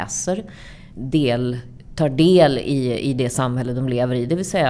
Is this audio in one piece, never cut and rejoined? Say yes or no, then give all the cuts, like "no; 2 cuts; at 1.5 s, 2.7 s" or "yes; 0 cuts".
yes; 0 cuts